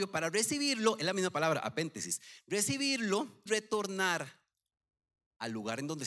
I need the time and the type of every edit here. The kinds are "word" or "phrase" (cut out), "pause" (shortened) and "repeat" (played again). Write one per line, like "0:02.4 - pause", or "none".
0:03.5 - word